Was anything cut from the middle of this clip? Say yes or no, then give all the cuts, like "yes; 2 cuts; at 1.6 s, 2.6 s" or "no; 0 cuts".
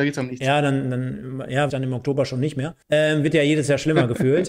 yes; 2 cuts; at 1.7 s, 2.8 s